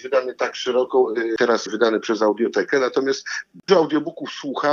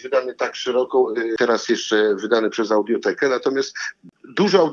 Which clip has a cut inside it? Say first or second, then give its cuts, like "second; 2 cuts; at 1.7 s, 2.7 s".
first; 2 cuts; at 1.7 s, 3.7 s